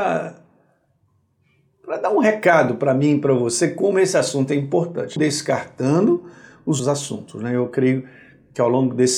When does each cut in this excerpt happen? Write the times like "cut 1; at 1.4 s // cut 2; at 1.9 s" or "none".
cut 1; at 5.2 s // cut 2; at 6.8 s